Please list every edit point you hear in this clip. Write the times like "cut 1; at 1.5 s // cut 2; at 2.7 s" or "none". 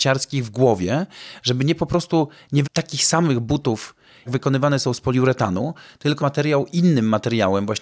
cut 1; at 2.6 s // cut 2; at 4.3 s // cut 3; at 6.2 s